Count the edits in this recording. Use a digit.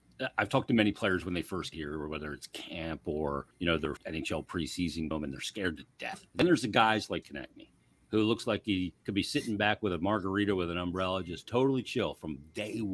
7